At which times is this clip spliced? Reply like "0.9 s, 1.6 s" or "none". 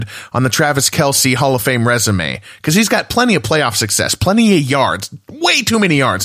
none